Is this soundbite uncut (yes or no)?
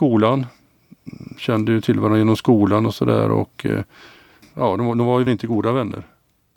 no